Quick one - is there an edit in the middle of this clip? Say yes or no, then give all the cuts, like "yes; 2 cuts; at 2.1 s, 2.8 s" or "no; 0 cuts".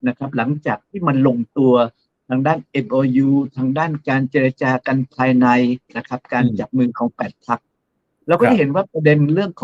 no; 0 cuts